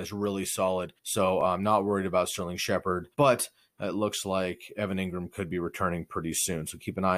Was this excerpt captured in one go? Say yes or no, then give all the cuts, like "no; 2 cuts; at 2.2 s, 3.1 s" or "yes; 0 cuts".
no; 2 cuts; at 1.0 s, 3.1 s